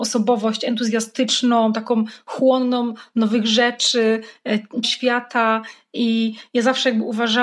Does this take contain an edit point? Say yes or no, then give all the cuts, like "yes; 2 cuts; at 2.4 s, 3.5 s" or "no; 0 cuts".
yes; 1 cut; at 4.8 s